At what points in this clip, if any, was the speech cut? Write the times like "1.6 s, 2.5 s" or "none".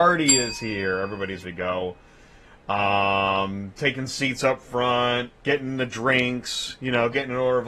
1.4 s, 5.4 s